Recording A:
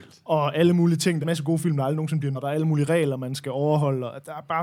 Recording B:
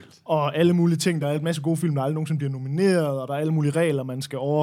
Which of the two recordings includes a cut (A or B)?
A